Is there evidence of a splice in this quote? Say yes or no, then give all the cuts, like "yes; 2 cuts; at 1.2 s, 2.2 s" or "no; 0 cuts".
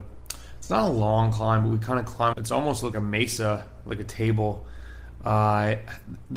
yes; 2 cuts; at 2.3 s, 2.9 s